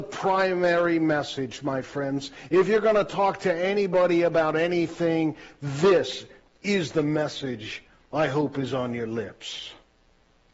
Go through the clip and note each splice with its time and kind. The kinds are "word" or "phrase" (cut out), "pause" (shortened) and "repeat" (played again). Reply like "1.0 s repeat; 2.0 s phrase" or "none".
none